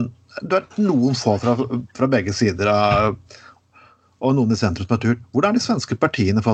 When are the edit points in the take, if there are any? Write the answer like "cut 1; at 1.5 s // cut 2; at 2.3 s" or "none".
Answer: none